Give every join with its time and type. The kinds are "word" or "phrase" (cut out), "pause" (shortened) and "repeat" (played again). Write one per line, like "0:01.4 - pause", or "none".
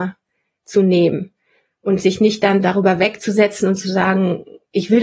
none